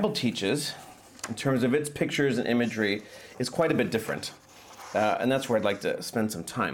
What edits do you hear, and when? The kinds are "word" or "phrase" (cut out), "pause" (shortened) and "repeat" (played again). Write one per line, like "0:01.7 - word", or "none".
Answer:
none